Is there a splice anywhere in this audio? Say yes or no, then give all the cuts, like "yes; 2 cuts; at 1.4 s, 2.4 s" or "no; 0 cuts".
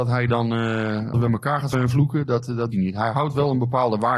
yes; 3 cuts; at 1.1 s, 1.7 s, 2.7 s